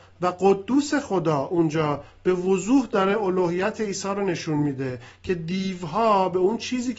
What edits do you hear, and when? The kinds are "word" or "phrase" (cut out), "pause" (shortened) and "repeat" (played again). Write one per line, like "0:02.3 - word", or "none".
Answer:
none